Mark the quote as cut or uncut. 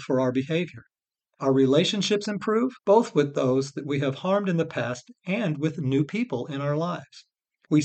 cut